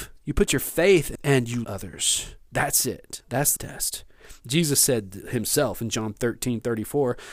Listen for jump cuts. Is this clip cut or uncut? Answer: cut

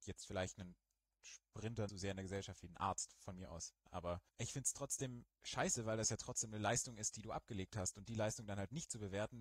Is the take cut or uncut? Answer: cut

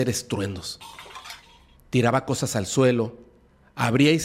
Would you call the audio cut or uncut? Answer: uncut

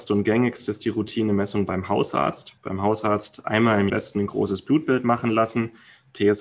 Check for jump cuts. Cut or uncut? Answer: cut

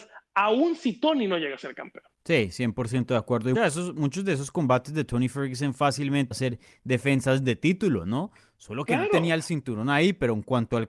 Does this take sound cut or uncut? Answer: cut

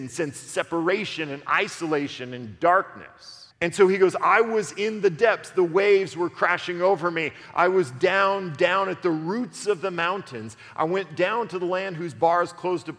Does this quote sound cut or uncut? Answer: cut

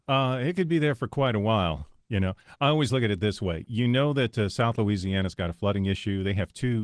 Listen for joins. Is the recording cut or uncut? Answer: uncut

